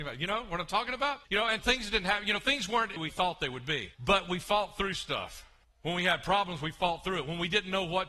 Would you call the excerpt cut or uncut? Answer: cut